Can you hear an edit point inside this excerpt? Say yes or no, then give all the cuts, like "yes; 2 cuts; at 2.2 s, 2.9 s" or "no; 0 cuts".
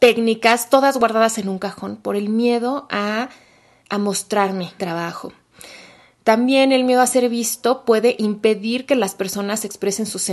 yes; 1 cut; at 4.8 s